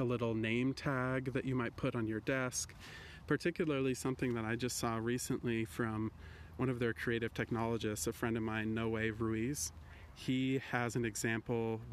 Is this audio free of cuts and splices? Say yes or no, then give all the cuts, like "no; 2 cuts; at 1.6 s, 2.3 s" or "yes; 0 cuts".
yes; 0 cuts